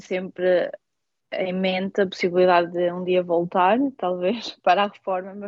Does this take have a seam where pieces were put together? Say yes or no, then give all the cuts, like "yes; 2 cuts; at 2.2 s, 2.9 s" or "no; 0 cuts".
no; 0 cuts